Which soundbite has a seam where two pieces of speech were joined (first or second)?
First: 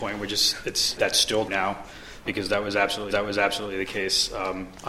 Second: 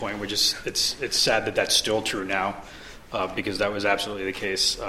first